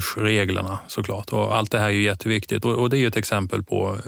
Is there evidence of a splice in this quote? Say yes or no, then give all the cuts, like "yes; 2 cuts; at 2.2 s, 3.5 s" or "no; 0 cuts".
no; 0 cuts